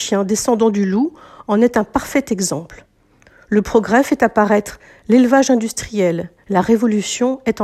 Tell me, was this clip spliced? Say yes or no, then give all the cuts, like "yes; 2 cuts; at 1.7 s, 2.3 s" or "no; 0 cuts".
no; 0 cuts